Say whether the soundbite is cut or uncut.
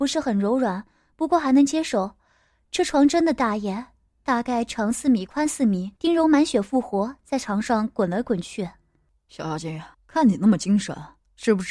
cut